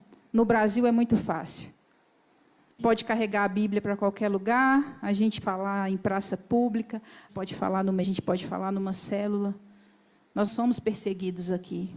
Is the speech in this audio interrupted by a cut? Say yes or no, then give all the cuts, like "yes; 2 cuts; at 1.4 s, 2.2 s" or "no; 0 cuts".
yes; 5 cuts; at 2.8 s, 5.4 s, 7.3 s, 8.0 s, 10.5 s